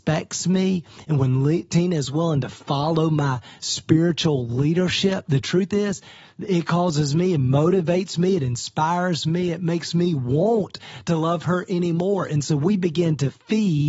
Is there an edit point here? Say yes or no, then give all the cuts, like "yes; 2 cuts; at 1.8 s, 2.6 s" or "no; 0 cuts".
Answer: no; 0 cuts